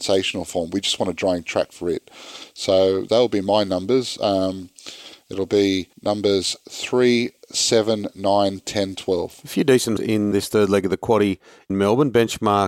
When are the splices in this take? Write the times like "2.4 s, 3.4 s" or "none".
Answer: 5.9 s, 10.0 s, 10.3 s, 11.7 s